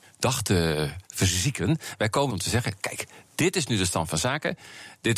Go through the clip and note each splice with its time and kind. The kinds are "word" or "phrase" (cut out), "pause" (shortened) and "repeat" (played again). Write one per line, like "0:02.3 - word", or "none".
0:01.1 - pause
0:02.3 - word